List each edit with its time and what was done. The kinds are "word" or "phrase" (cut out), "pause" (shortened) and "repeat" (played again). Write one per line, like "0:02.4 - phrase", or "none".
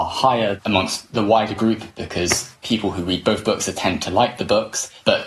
0:02.6 - pause